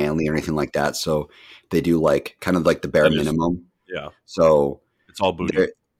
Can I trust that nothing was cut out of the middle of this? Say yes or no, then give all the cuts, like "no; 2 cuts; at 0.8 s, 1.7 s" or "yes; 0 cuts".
yes; 0 cuts